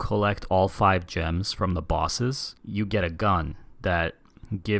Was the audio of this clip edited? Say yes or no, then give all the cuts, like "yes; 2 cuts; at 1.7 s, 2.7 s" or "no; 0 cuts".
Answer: yes; 1 cut; at 2.6 s